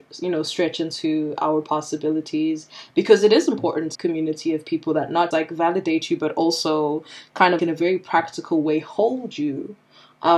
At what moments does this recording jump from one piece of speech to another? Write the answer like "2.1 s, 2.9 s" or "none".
3.9 s, 5.3 s, 7.6 s

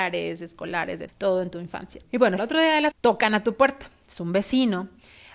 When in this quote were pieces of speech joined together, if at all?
1.1 s, 2.0 s, 2.4 s, 2.9 s

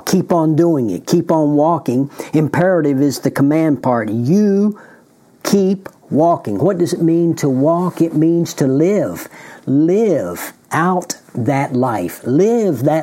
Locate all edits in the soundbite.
none

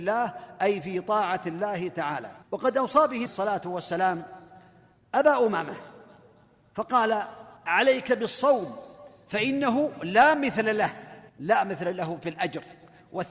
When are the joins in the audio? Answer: 2.4 s, 3.3 s, 7.6 s, 11.3 s

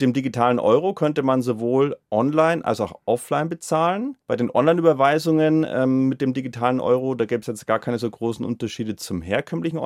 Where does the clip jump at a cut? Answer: 4.2 s

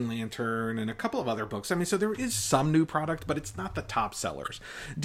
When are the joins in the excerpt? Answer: none

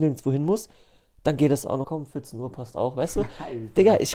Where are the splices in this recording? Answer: 1.8 s

